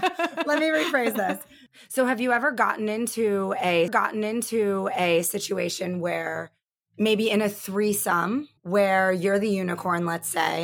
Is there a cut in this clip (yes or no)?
yes